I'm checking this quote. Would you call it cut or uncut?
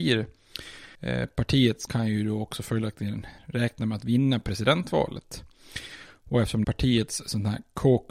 cut